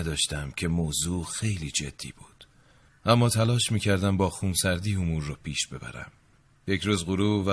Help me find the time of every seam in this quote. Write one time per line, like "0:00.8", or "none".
none